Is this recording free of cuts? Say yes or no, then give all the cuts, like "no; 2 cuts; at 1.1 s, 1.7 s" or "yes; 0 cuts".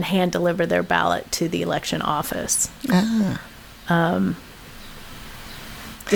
yes; 0 cuts